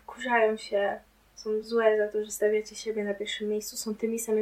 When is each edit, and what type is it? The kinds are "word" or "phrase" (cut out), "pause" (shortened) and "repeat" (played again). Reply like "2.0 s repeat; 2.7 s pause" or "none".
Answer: none